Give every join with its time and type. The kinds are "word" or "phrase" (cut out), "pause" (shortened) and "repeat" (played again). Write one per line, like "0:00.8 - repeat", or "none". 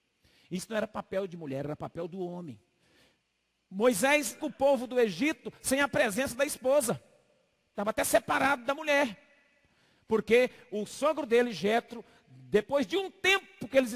0:04.4 - word